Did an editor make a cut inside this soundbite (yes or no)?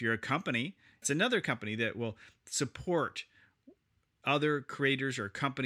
yes